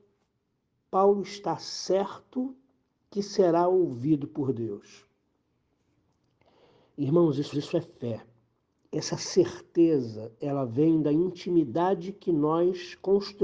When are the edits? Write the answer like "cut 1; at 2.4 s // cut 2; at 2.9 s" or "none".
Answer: cut 1; at 7.5 s